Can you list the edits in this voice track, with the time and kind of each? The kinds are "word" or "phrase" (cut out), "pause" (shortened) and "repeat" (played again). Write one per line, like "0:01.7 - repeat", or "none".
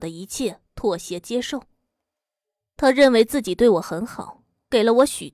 none